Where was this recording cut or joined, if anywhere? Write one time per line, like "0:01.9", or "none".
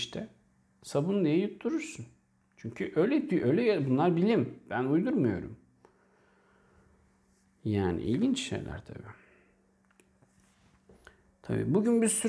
none